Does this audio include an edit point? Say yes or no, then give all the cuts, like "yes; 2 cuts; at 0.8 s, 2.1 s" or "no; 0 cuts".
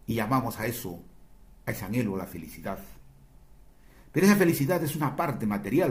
no; 0 cuts